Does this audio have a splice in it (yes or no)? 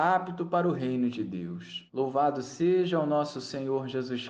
yes